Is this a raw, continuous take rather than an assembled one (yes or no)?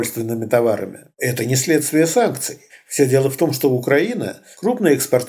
yes